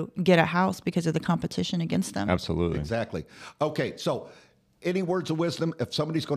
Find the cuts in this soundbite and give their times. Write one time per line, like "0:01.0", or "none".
none